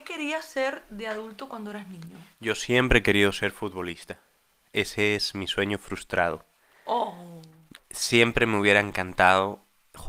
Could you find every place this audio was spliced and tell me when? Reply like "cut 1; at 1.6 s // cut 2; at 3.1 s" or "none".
none